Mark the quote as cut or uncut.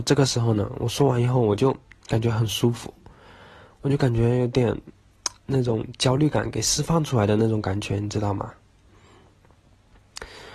uncut